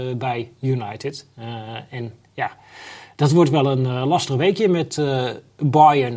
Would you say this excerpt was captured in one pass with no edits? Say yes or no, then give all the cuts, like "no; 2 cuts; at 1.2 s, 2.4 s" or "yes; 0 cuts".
yes; 0 cuts